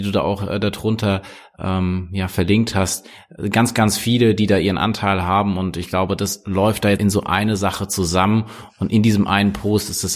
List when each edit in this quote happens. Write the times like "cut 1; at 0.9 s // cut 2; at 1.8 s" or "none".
cut 1; at 7.0 s